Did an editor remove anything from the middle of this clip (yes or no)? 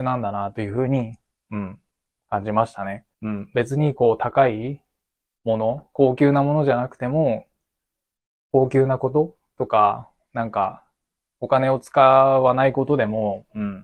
yes